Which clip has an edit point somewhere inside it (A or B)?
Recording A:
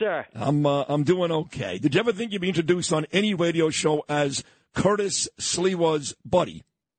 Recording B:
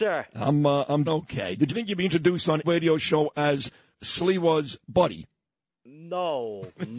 B